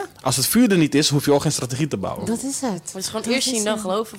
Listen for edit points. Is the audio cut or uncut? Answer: uncut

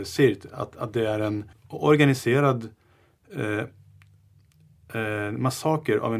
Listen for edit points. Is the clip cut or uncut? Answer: cut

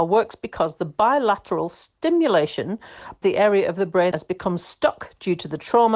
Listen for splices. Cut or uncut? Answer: cut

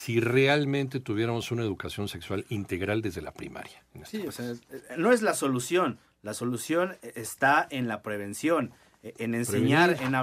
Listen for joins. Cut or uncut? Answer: uncut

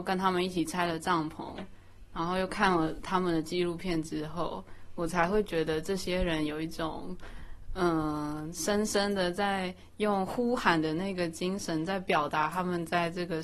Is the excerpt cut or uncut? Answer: uncut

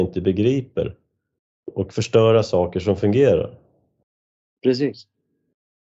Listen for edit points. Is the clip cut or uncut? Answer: uncut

